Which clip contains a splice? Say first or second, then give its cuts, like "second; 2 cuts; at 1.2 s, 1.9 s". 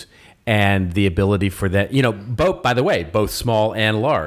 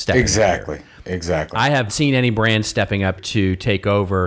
second; 2 cuts; at 1.9 s, 3.2 s